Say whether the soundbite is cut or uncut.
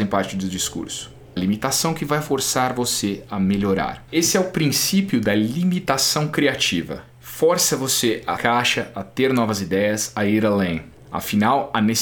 cut